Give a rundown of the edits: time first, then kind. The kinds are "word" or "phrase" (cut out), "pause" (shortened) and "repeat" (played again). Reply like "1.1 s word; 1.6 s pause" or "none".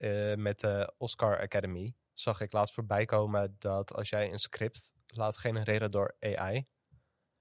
2.0 s pause